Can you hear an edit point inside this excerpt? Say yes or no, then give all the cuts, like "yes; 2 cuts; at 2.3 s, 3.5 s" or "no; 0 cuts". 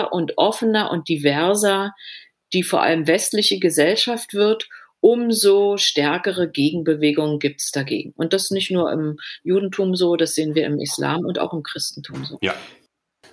no; 0 cuts